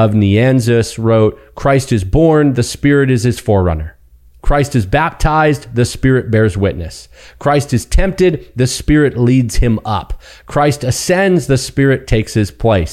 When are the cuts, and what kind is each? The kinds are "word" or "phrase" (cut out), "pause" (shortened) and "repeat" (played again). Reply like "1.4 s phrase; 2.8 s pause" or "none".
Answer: none